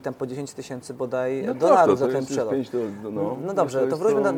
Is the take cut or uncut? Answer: uncut